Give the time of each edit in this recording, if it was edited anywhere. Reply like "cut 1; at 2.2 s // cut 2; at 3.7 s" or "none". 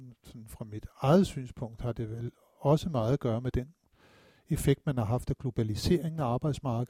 none

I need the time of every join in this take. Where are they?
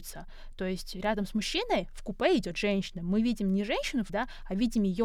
cut 1; at 4.1 s

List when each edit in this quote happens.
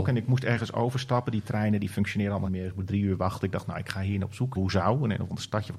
cut 1; at 2.4 s // cut 2; at 4.5 s

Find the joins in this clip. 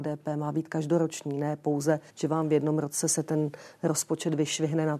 cut 1; at 2.1 s

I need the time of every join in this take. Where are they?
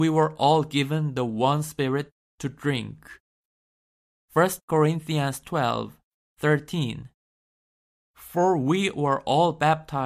none

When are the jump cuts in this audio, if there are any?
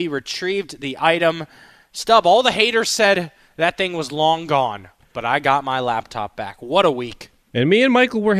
none

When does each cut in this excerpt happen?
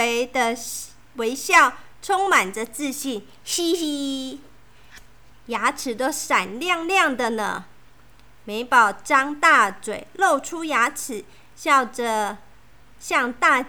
none

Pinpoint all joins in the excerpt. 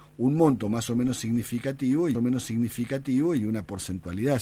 cut 1; at 2.1 s

